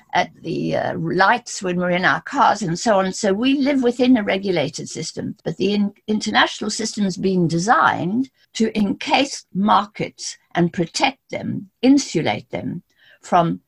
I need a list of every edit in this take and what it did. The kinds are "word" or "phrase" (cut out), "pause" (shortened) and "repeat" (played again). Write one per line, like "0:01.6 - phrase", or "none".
0:05.4 - pause
0:08.4 - pause